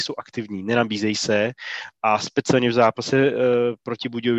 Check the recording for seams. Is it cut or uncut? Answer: uncut